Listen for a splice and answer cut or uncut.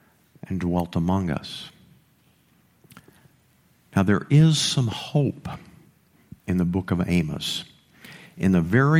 uncut